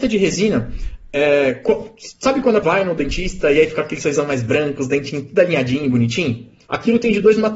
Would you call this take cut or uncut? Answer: cut